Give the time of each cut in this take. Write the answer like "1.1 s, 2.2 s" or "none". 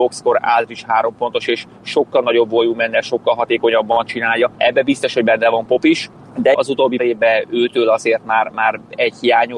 6.5 s, 7.0 s